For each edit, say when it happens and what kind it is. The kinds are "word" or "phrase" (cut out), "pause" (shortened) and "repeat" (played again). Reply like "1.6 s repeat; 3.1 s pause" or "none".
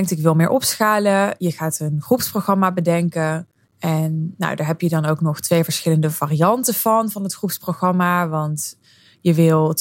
3.6 s pause